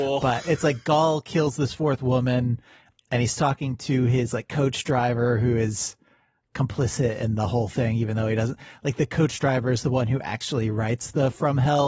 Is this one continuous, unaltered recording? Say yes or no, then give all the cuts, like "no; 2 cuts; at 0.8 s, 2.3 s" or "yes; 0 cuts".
yes; 0 cuts